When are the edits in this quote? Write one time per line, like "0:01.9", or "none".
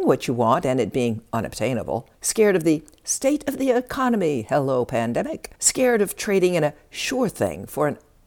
0:02.1
0:05.6